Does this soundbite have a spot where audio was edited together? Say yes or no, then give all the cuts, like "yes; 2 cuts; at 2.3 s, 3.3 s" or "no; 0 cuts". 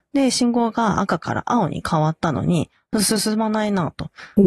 no; 0 cuts